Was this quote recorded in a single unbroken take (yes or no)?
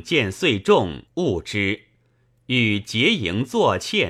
no